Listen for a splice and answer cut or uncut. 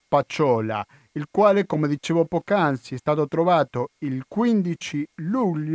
uncut